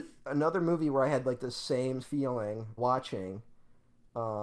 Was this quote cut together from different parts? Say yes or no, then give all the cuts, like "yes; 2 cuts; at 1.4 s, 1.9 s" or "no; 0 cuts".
yes; 2 cuts; at 2.0 s, 2.8 s